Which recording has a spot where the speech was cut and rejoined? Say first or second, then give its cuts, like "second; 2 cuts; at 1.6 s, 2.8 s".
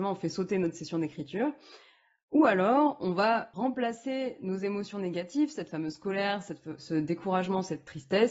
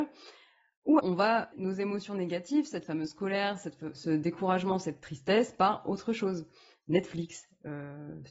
second; 2 cuts; at 1.0 s, 1.5 s